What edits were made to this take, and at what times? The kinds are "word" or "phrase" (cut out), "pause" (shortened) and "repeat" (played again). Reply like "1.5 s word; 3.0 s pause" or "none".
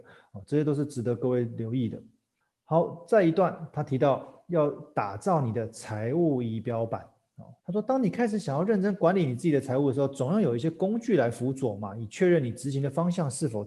2.4 s pause; 7.6 s pause